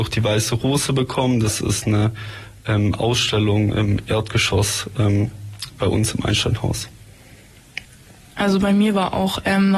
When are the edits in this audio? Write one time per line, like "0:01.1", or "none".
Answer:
none